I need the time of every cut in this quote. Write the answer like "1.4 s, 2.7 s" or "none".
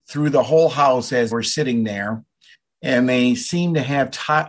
1.3 s, 2.5 s